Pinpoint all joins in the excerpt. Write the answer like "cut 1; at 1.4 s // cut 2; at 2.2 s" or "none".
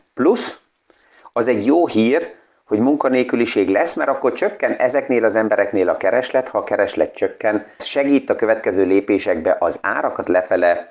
cut 1; at 7.8 s